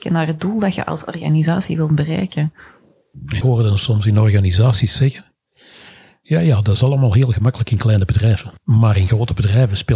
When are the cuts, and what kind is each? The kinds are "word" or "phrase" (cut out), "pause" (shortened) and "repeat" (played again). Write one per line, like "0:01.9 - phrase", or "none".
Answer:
0:03.4 - word